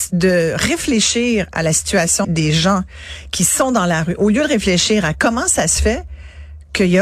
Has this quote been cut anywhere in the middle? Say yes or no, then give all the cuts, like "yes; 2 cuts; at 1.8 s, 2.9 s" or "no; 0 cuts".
yes; 1 cut; at 2.2 s